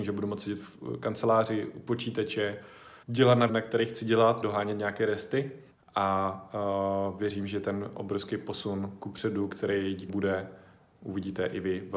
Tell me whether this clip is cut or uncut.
cut